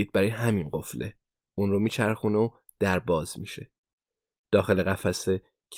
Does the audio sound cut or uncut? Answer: uncut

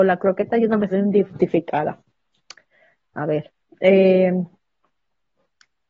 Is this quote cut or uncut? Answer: cut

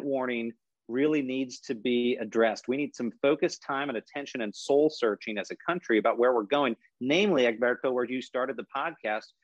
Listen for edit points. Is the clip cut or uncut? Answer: uncut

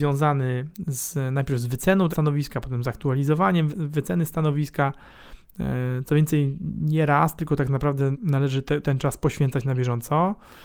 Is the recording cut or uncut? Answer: cut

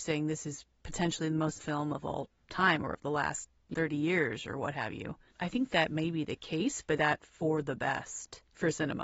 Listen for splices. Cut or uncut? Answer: cut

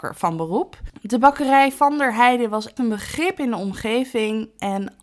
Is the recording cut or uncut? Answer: cut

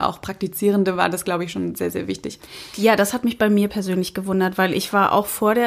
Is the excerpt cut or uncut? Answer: uncut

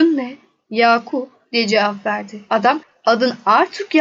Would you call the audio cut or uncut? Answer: uncut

